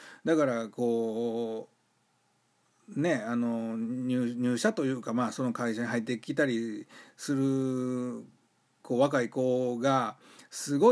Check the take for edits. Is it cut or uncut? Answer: uncut